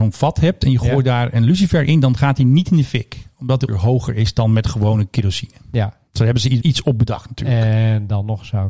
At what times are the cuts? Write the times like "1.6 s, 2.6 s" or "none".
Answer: 3.7 s, 6.1 s, 6.6 s